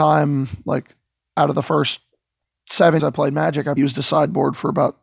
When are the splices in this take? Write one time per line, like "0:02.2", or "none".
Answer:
0:03.0
0:03.8